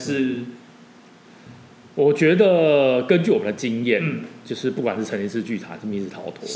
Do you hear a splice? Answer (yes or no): no